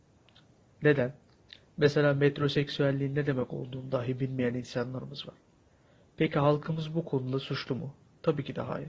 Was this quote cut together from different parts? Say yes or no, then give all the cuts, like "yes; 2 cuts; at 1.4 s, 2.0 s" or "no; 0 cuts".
no; 0 cuts